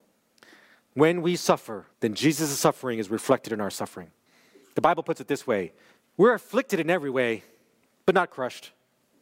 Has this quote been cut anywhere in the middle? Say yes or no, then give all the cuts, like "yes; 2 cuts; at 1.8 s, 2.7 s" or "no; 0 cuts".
yes; 3 cuts; at 1.9 s, 4.3 s, 6.0 s